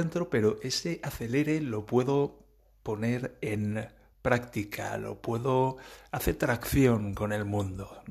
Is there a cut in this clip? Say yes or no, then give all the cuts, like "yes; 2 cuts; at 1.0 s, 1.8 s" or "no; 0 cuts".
no; 0 cuts